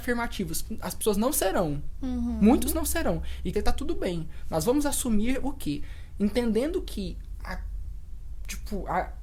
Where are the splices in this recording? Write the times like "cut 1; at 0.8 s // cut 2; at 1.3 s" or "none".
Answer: cut 1; at 3.5 s